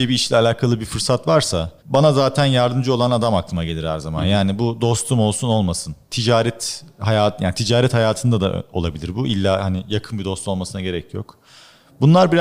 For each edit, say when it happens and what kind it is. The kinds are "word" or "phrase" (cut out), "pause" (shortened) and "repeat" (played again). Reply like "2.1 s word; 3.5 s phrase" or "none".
1.8 s pause